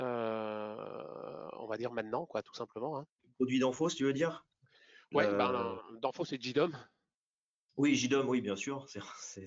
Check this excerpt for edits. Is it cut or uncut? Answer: cut